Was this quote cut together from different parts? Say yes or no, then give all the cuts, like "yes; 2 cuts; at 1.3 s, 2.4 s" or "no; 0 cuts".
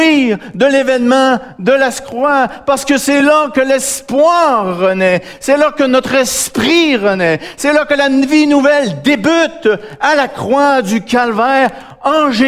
no; 0 cuts